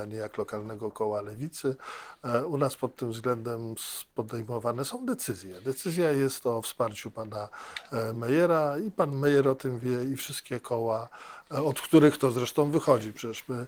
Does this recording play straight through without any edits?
yes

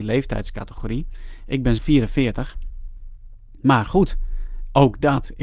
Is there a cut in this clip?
yes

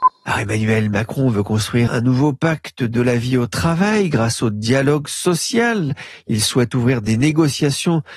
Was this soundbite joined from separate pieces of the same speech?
yes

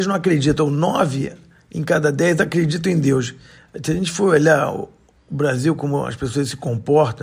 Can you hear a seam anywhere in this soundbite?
no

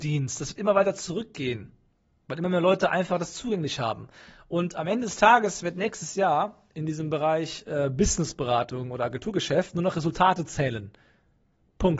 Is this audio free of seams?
yes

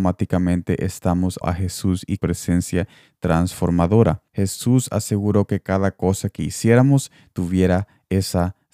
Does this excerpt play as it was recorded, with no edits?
no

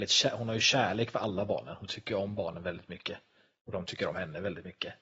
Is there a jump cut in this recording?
no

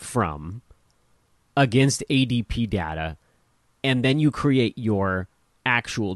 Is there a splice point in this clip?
no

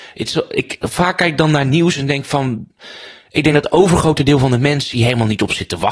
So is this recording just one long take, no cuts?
yes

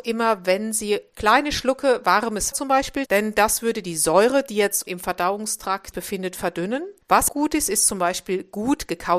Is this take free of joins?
no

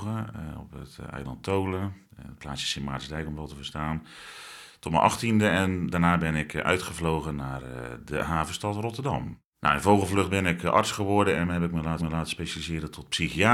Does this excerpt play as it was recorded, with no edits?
no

